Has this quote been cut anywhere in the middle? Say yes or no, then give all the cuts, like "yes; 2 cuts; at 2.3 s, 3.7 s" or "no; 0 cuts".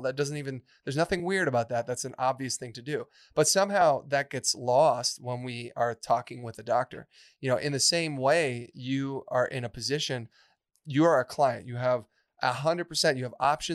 no; 0 cuts